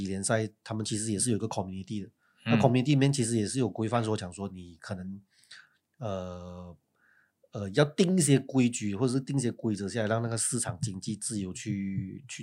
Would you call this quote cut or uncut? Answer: uncut